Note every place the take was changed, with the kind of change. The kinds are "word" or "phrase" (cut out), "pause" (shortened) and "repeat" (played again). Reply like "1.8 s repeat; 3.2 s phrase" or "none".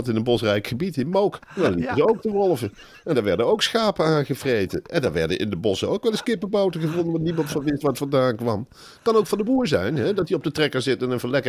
1.4 s pause